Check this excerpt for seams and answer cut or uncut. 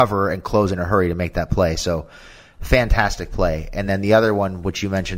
uncut